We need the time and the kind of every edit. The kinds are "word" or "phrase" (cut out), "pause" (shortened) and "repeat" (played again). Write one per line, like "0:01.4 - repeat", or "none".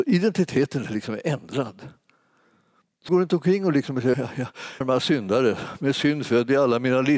0:03.1 - word
0:04.1 - word
0:04.8 - word